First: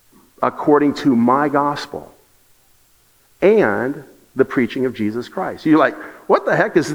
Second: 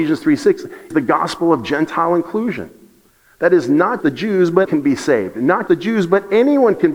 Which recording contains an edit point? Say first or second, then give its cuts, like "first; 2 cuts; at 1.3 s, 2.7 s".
second; 4 cuts; at 0.9 s, 4.0 s, 4.7 s, 5.7 s